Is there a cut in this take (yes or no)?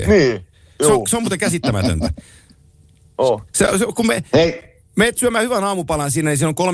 yes